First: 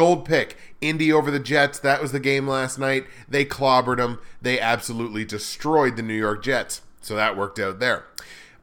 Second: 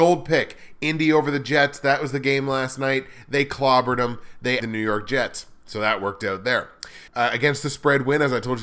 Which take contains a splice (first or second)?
second